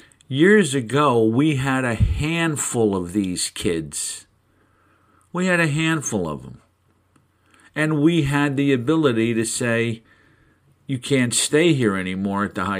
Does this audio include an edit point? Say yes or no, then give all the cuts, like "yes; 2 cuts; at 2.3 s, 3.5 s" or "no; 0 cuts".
no; 0 cuts